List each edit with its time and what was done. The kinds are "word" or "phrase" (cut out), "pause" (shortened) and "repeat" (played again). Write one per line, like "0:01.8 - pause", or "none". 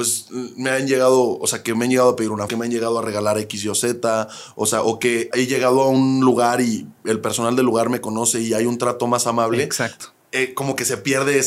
0:02.5 - word
0:05.3 - word